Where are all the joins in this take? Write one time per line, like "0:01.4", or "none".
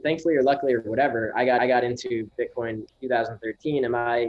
0:01.6
0:02.9